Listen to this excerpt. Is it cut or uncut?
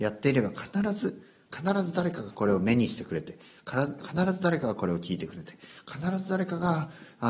uncut